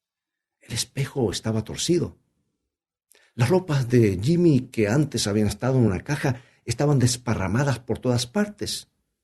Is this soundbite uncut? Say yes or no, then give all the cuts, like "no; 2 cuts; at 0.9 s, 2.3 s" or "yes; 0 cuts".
yes; 0 cuts